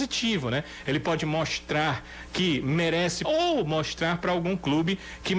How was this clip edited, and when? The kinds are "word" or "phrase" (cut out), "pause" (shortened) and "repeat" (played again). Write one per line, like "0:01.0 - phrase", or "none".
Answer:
0:03.2 - word